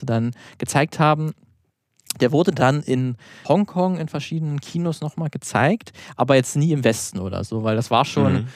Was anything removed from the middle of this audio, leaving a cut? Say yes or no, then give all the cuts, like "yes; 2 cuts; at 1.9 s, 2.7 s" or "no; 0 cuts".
yes; 1 cut; at 3.4 s